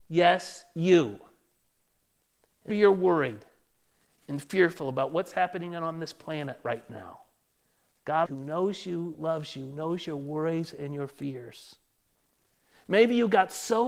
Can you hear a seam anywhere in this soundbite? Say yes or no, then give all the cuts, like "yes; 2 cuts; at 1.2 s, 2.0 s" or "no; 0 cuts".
yes; 2 cuts; at 2.7 s, 8.3 s